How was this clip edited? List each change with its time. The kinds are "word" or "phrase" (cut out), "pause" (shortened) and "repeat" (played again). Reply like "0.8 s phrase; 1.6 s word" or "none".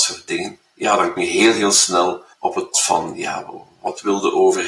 1.2 s word; 2.3 s pause; 2.7 s word